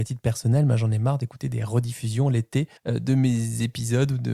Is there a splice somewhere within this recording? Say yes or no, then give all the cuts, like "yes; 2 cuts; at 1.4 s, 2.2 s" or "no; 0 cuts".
yes; 1 cut; at 2.8 s